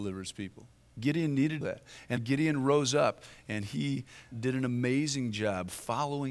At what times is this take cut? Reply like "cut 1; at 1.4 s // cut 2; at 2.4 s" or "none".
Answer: cut 1; at 1.6 s // cut 2; at 2.2 s // cut 3; at 4.3 s